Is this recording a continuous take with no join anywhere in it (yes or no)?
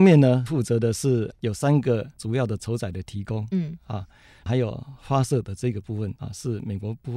yes